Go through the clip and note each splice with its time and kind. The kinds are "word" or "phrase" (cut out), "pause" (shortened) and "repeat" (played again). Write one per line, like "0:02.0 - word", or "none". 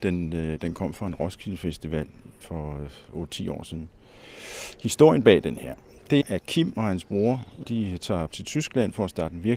0:02.4 - word
0:06.2 - word
0:07.6 - word
0:08.3 - phrase

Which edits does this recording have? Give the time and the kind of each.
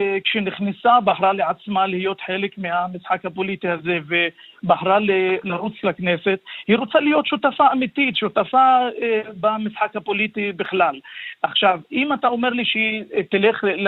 none

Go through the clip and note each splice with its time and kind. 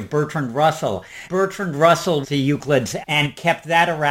0:01.3 - word
0:02.2 - phrase
0:03.0 - word

